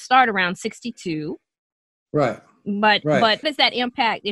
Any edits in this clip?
yes; 1 cut; at 3.4 s

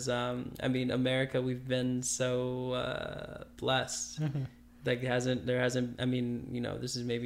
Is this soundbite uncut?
yes; 0 cuts

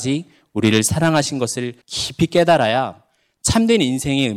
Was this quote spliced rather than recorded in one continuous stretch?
yes; 1 cut; at 1.8 s

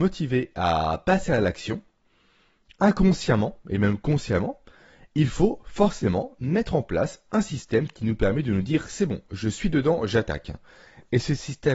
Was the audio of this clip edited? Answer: no; 0 cuts

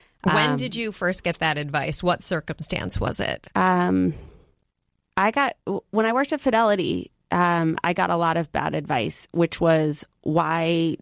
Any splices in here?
yes; 1 cut; at 3.5 s

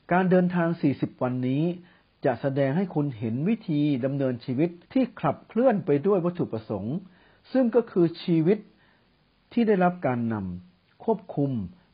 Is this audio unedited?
no; 1 cut; at 4.8 s

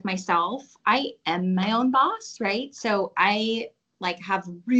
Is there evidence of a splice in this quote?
no; 0 cuts

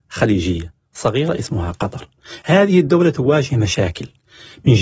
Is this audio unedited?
yes; 0 cuts

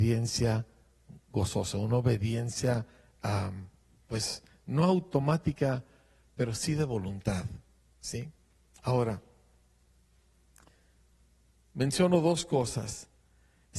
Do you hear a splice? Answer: no; 0 cuts

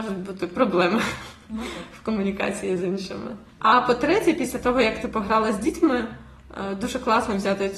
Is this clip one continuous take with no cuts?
no; 1 cut; at 3.5 s

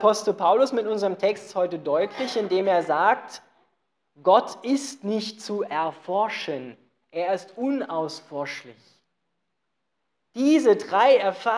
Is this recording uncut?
yes; 0 cuts

